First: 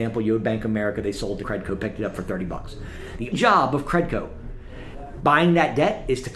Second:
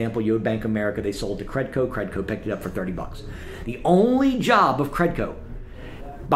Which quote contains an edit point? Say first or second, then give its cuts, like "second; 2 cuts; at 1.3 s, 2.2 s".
first; 2 cuts; at 1.4 s, 3.3 s